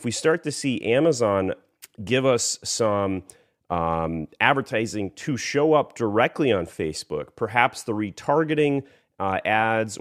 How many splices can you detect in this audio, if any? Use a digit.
0